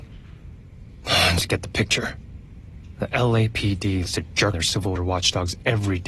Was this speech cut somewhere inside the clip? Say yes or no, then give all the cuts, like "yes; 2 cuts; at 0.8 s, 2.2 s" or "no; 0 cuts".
yes; 4 cuts; at 1.4 s, 4.1 s, 4.5 s, 5.0 s